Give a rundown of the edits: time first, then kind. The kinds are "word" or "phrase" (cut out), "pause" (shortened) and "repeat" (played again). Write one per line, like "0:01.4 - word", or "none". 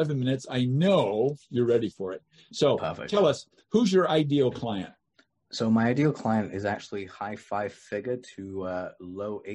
none